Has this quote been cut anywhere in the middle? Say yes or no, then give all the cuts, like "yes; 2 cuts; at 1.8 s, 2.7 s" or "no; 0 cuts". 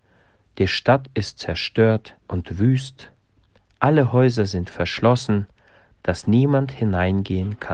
yes; 1 cut; at 2.2 s